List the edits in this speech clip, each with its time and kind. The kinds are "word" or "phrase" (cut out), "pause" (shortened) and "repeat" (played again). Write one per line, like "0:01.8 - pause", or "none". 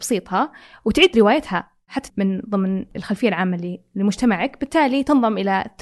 0:02.1 - word